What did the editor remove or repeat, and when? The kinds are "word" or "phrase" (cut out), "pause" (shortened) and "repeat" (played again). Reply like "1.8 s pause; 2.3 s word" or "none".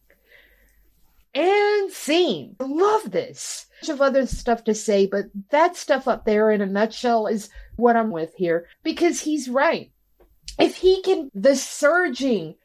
2.6 s phrase; 3.8 s phrase; 7.8 s word; 8.1 s word; 8.7 s pause; 11.3 s word